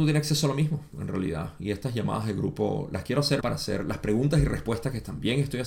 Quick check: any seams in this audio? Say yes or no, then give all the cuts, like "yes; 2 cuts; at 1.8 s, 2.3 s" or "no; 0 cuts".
yes; 1 cut; at 3.4 s